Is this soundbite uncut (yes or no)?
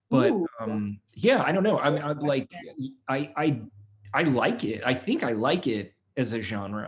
no